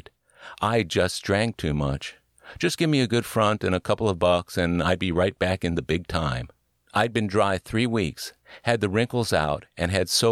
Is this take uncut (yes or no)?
yes